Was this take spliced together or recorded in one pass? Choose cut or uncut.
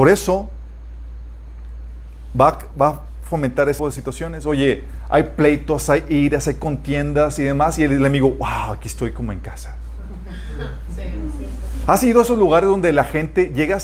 cut